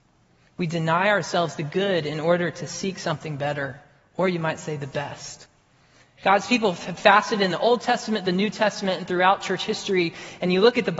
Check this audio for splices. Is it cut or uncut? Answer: uncut